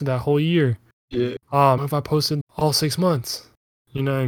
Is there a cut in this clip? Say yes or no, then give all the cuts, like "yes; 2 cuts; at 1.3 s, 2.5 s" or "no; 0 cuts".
yes; 2 cuts; at 1.8 s, 2.4 s